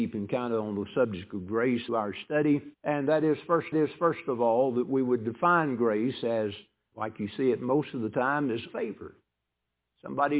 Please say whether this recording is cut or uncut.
cut